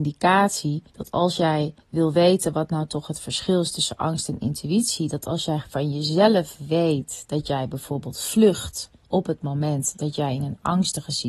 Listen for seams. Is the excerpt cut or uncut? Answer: cut